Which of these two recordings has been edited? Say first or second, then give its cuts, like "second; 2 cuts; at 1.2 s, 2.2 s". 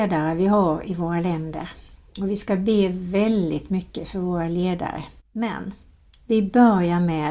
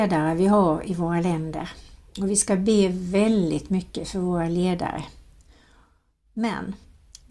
first; 1 cut; at 5.2 s